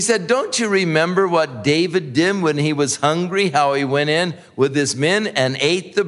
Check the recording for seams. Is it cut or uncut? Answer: uncut